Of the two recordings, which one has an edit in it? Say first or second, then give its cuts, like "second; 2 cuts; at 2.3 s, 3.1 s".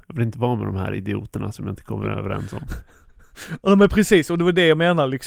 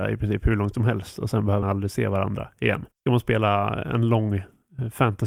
second; 2 cuts; at 1.6 s, 2.9 s